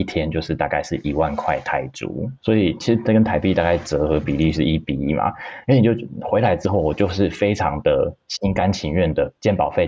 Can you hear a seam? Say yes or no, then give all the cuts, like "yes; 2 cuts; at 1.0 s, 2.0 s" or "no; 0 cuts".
yes; 1 cut; at 2.4 s